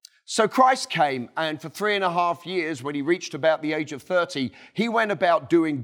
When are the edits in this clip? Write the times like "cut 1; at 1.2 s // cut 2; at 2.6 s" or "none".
none